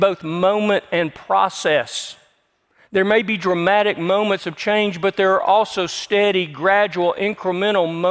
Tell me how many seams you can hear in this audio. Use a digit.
0